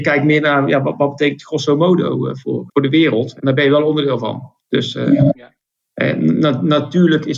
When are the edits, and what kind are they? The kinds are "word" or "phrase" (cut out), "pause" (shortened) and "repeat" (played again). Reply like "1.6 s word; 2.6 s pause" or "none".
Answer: 2.7 s word; 4.6 s pause